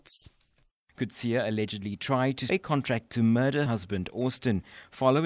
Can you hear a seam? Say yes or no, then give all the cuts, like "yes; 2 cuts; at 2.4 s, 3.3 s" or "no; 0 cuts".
yes; 3 cuts; at 2.5 s, 3.1 s, 3.7 s